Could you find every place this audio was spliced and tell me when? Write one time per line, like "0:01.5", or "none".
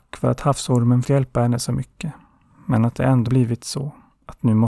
0:01.0
0:03.3

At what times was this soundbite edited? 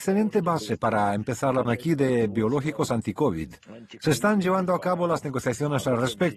0:01.6

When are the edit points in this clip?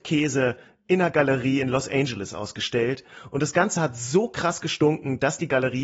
none

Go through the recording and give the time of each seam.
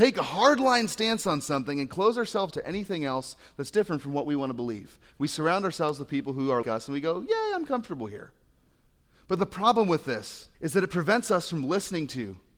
0:02.5
0:06.6
0:10.5

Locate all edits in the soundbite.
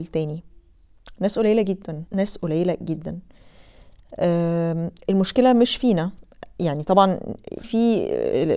0:02.1
0:07.6

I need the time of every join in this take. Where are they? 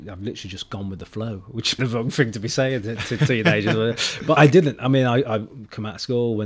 0:01.8
0:04.4

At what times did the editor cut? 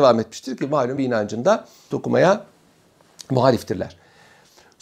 0:01.0
0:01.9

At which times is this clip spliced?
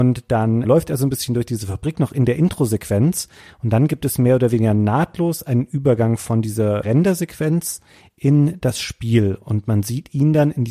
none

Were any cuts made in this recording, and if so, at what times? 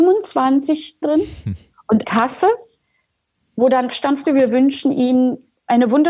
0:01.0
0:02.0
0:03.9
0:04.3

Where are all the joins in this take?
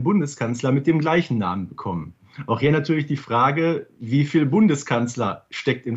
0:03.9

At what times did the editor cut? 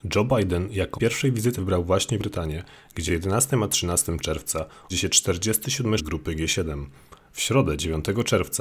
0:00.9
0:01.6
0:02.2
0:03.1
0:04.9
0:06.0

